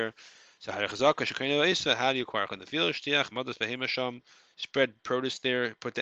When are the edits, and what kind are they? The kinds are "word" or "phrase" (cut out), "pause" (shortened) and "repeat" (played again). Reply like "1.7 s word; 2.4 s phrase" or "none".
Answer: 2.5 s word; 3.3 s word